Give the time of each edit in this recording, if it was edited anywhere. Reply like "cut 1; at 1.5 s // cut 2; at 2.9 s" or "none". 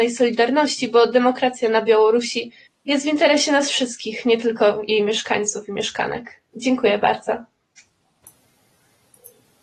cut 1; at 2.7 s